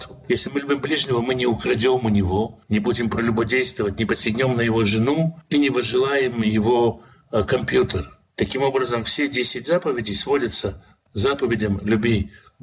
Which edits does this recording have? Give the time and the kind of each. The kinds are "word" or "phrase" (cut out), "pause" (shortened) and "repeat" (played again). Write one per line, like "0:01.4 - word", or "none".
0:11.1 - phrase